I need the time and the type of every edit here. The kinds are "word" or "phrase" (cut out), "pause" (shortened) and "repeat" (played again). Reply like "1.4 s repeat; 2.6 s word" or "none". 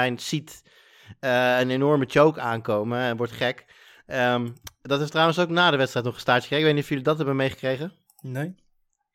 none